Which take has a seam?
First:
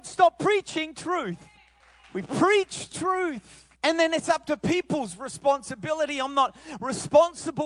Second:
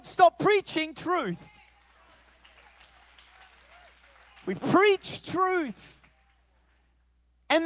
first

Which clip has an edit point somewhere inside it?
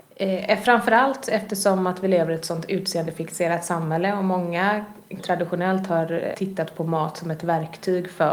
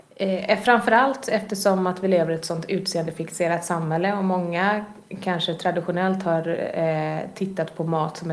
first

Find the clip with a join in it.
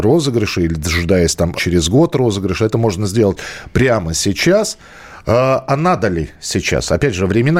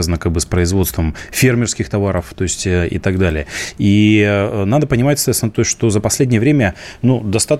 first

